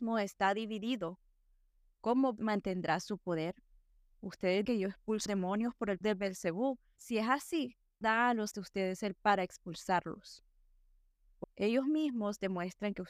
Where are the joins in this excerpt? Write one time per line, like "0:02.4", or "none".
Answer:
0:02.4
0:04.6
0:05.3
0:06.0
0:07.0
0:08.0
0:08.5
0:09.2
0:11.4